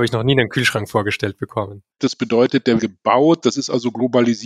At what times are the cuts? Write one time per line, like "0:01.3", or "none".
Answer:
0:01.9
0:02.8